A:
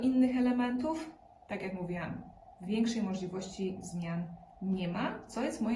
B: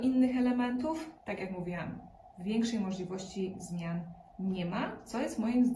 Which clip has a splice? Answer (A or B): B